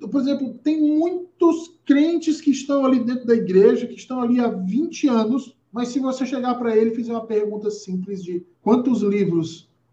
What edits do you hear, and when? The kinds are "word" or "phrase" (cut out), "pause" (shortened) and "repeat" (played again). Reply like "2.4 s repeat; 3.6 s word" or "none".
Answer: 5.6 s pause; 8.5 s pause